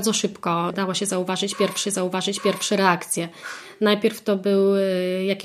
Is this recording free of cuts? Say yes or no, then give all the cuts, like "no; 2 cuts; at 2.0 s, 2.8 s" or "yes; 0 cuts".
no; 1 cut; at 1.8 s